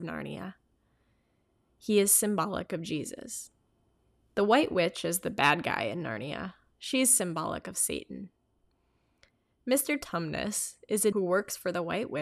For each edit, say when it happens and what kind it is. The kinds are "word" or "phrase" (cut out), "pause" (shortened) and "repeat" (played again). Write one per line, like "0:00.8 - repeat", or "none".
0:11.1 - word